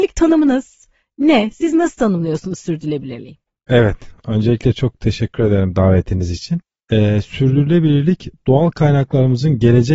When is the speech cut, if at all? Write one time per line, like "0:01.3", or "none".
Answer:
none